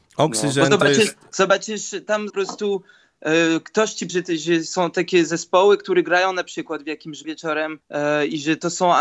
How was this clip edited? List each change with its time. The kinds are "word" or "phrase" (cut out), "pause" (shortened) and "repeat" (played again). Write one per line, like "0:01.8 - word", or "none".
0:02.3 - phrase
0:04.1 - word
0:07.2 - word